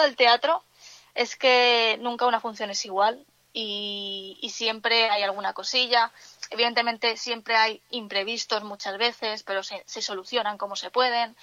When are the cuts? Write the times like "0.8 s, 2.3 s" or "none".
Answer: none